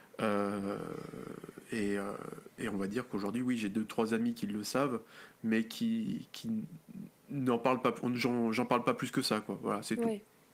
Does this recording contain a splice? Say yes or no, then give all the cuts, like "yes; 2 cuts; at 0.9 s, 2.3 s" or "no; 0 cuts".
no; 0 cuts